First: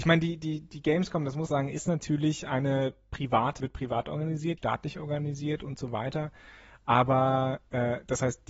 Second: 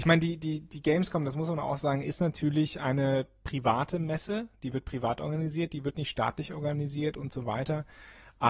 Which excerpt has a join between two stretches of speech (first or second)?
first